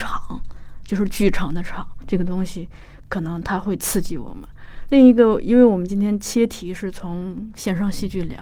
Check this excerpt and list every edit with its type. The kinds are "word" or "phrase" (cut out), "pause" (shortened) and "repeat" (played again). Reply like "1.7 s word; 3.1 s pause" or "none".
2.0 s word

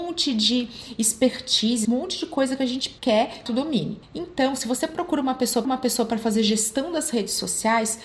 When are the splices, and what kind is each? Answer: 1.8 s word; 3.0 s pause; 3.5 s phrase; 5.6 s repeat

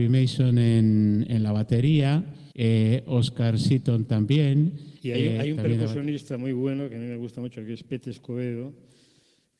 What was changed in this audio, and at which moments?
2.5 s pause; 5.0 s pause

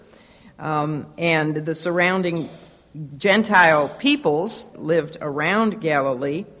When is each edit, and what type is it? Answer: 4.7 s word

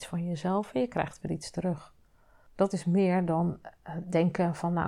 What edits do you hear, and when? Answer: none

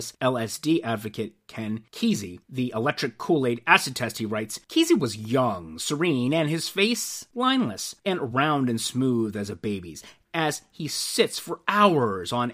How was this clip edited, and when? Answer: none

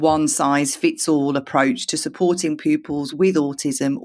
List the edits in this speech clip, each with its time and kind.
none

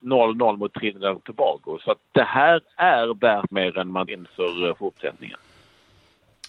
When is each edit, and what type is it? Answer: 3.5 s word; 4.1 s word

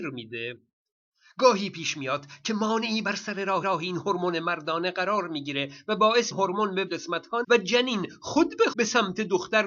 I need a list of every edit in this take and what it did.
3.6 s repeat; 6.3 s phrase; 6.9 s word; 7.4 s word; 8.7 s word

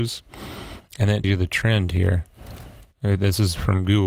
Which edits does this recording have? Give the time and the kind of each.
1.2 s word

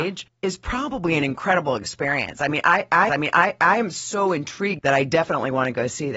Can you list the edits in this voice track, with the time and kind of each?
3.1 s repeat; 4.8 s word

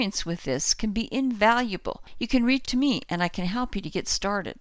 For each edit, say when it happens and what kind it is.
2.6 s word

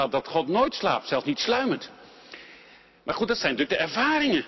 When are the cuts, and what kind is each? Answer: none

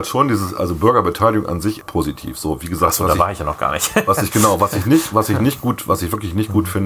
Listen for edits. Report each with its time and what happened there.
1.8 s word

